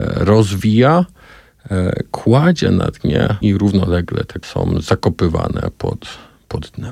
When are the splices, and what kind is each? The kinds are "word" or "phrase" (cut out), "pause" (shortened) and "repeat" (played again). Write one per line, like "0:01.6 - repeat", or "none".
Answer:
0:03.4 - word
0:04.4 - word